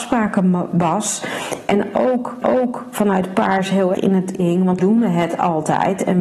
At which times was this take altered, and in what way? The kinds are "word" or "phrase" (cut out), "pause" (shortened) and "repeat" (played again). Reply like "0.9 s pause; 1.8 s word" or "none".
2.4 s repeat; 3.9 s word; 4.4 s phrase; 4.8 s word